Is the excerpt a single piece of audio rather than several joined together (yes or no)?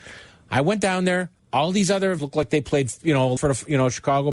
no